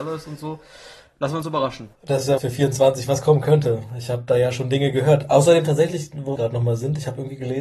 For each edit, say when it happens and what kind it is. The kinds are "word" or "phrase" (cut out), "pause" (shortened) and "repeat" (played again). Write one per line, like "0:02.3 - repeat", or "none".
0:02.0 - pause
0:02.4 - word
0:06.4 - phrase

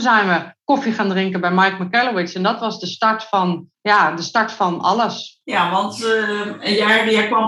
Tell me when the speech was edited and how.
0:03.7 - pause
0:05.4 - pause

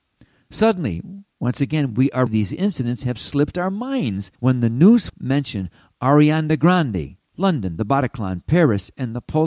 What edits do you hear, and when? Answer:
0:01.3 - pause
0:02.3 - phrase
0:04.3 - pause
0:05.1 - word
0:07.3 - pause

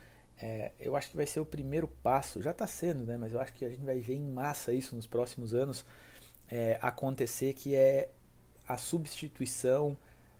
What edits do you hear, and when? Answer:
none

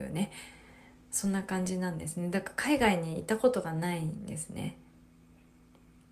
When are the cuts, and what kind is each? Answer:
none

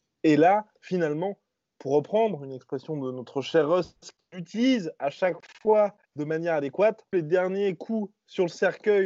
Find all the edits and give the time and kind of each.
0:06.0 - pause
0:07.1 - phrase

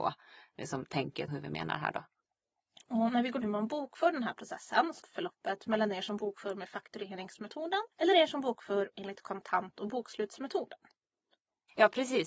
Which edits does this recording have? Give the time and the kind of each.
0:01.3 - word
0:03.4 - phrase
0:05.0 - phrase
0:07.9 - pause

